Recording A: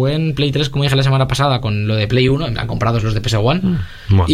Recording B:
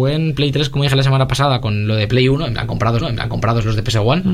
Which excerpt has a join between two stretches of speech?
B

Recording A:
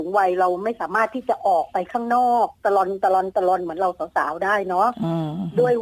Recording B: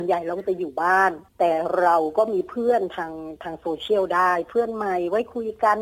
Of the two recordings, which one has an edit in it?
B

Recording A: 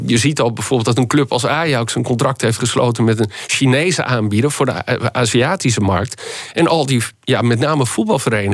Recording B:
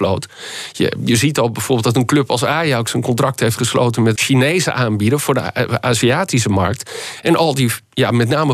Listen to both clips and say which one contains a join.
B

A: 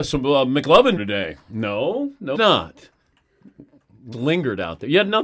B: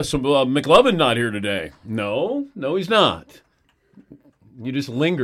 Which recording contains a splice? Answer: A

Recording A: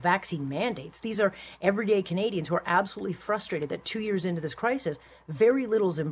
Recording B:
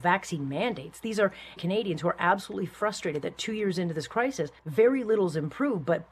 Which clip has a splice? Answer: B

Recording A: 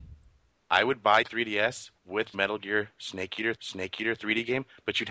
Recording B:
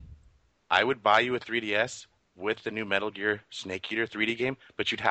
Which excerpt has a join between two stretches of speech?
A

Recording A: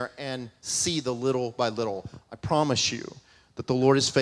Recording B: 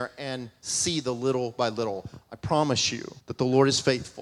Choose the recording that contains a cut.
B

